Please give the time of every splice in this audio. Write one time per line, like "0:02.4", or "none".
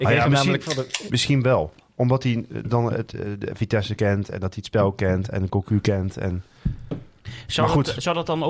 0:01.1